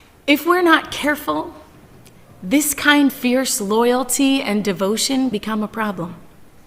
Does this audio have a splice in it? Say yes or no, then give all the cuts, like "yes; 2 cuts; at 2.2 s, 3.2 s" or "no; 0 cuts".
yes; 2 cuts; at 3.1 s, 5.3 s